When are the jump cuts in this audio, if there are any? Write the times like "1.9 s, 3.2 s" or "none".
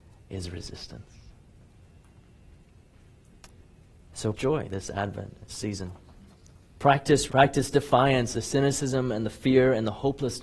4.3 s, 5.5 s, 7.3 s, 8.3 s

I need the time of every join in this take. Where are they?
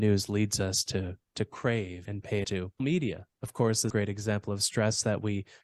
2.0 s, 2.4 s, 2.8 s, 3.9 s

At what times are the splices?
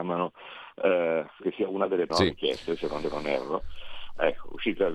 1.4 s, 2.1 s, 3.0 s

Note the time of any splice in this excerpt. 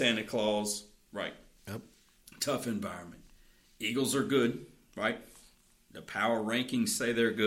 none

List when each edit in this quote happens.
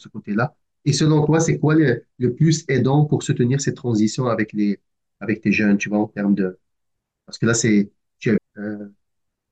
8.4 s

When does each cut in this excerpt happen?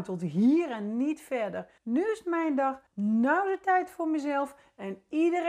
1.8 s, 2.9 s

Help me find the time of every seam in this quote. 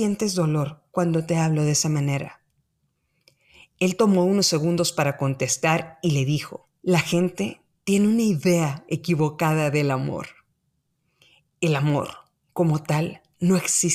6.8 s

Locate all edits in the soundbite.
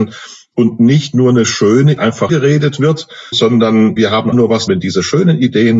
2.0 s, 2.3 s, 3.3 s, 4.0 s, 4.3 s, 4.7 s

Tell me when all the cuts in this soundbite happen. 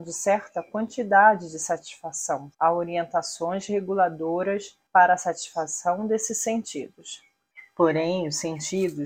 2.5 s, 4.9 s

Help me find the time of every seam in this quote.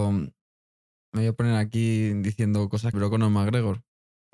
2.9 s

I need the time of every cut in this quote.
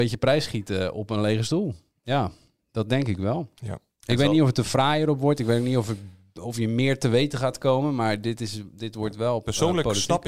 none

